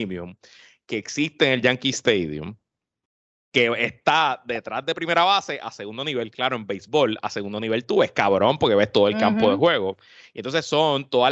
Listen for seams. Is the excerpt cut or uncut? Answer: uncut